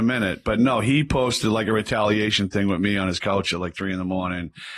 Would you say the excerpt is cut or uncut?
uncut